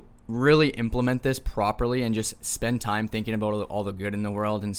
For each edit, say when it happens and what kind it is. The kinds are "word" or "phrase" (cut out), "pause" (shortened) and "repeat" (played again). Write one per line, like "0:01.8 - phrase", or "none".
none